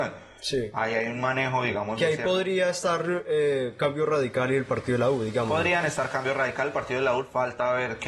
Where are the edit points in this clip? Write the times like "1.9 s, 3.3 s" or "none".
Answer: none